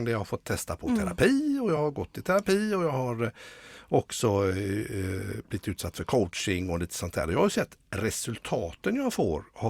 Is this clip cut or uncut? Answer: uncut